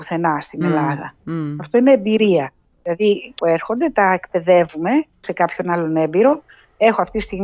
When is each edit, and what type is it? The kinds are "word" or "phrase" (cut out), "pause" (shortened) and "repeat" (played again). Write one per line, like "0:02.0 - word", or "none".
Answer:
0:02.6 - pause
0:03.4 - phrase
0:05.2 - word